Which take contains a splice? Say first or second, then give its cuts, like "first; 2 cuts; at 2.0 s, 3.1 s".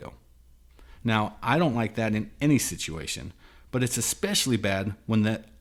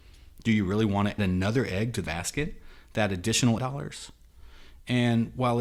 second; 3 cuts; at 1.2 s, 2.1 s, 3.6 s